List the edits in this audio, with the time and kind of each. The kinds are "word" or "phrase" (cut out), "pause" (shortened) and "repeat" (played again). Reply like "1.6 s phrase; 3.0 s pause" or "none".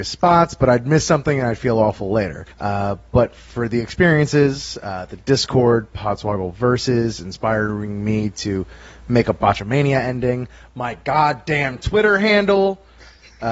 2.5 s pause